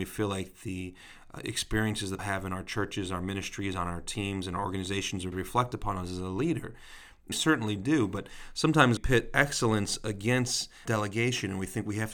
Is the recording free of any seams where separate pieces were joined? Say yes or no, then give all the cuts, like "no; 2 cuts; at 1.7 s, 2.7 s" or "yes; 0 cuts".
no; 5 cuts; at 2.2 s, 5.3 s, 7.3 s, 9.0 s, 10.9 s